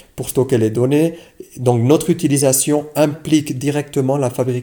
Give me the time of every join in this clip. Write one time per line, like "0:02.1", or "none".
none